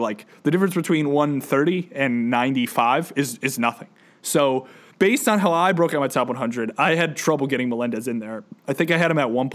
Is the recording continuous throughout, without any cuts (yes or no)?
no